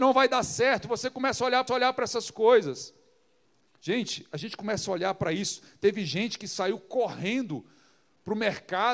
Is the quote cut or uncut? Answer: cut